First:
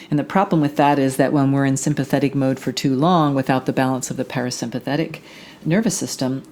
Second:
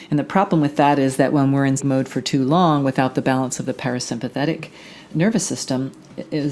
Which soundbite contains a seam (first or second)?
second